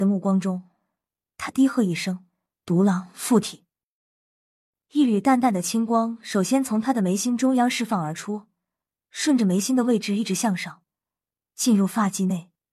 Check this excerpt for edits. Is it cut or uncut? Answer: uncut